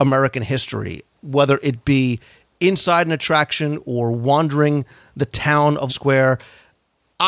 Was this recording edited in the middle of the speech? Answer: yes; 1 cut; at 5.9 s

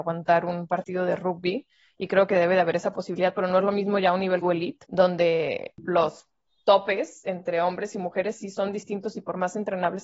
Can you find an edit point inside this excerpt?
yes; 1 cut; at 4.4 s

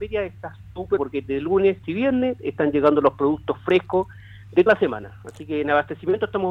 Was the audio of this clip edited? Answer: yes; 3 cuts; at 1.0 s, 1.8 s, 4.7 s

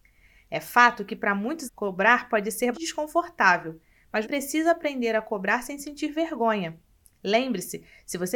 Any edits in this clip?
yes; 3 cuts; at 1.7 s, 2.7 s, 4.2 s

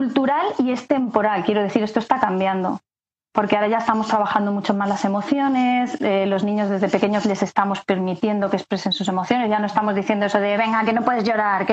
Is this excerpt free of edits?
yes; 0 cuts

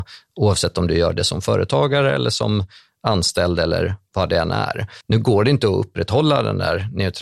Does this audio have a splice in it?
yes; 1 cut; at 5.0 s

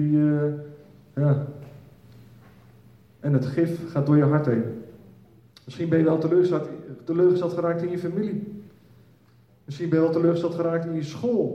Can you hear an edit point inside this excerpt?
no; 0 cuts

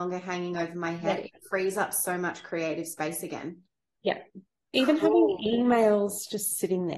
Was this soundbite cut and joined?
no; 0 cuts

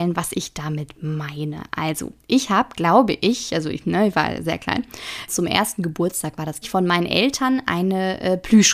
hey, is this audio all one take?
no; 2 cuts; at 5.3 s, 6.6 s

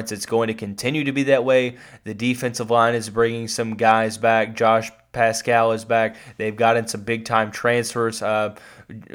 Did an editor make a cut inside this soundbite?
no; 0 cuts

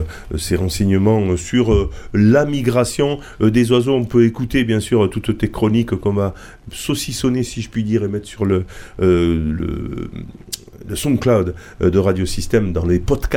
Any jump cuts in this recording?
no; 0 cuts

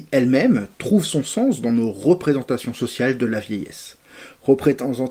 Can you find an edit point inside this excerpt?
no; 0 cuts

